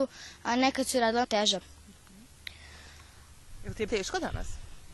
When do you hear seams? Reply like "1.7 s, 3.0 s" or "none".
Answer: 1.2 s, 1.6 s, 3.9 s